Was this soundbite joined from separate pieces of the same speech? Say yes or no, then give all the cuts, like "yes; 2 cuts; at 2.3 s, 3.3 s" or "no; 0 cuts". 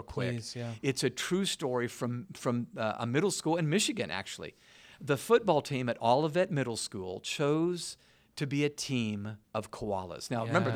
no; 0 cuts